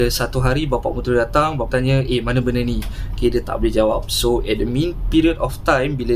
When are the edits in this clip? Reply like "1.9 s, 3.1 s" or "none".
1.7 s